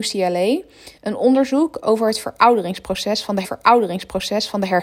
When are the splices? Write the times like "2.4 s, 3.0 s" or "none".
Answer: 1.0 s, 3.4 s